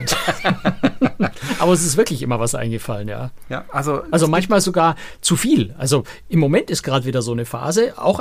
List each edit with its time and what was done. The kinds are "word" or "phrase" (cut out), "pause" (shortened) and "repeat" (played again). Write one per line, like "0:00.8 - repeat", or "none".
none

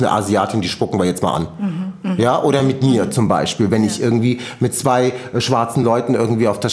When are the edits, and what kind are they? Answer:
none

